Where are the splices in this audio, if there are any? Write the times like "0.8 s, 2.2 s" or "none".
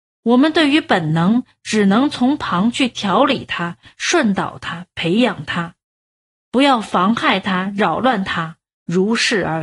none

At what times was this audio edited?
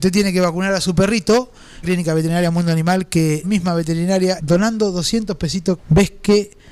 1.8 s, 3.4 s, 4.4 s, 5.8 s

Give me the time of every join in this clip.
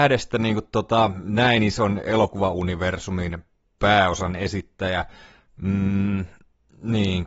none

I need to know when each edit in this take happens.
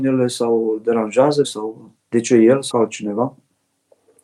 1.4 s, 2.7 s

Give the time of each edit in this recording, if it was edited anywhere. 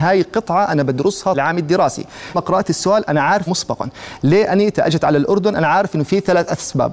1.3 s, 2.3 s, 3.5 s

